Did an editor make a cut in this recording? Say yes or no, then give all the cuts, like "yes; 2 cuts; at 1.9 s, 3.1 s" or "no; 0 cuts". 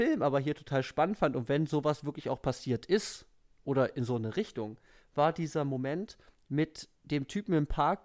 no; 0 cuts